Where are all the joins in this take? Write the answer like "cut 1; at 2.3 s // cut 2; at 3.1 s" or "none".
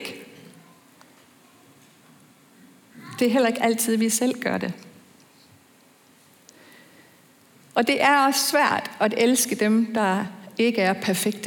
none